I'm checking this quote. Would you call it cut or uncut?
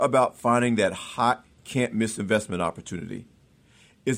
uncut